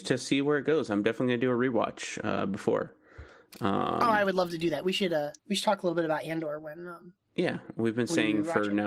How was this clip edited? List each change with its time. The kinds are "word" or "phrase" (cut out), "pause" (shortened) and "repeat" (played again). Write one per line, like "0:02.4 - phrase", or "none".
0:05.4 - pause